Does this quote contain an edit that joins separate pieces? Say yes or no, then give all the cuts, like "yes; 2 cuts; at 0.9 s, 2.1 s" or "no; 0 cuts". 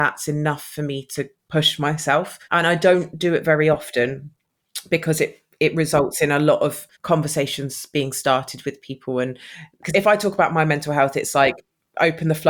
yes; 4 cuts; at 1.4 s, 2.4 s, 6.9 s, 9.9 s